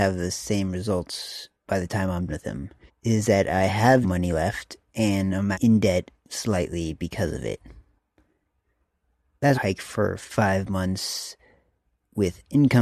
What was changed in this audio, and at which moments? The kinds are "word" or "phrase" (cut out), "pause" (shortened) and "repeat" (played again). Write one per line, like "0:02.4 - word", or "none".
0:01.5 - pause
0:02.3 - word
0:02.9 - pause
0:04.0 - word
0:05.5 - word
0:09.5 - phrase